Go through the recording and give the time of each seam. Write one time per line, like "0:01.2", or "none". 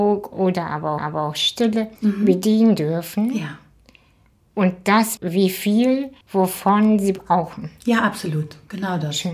0:01.0
0:02.0
0:05.2
0:06.2